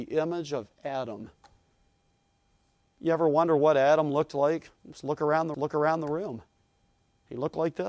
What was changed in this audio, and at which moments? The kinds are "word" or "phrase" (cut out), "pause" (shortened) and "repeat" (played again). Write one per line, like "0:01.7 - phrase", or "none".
0:05.5 - repeat